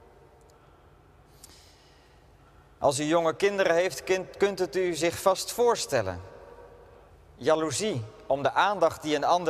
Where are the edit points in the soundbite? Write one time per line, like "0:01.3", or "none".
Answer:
0:07.1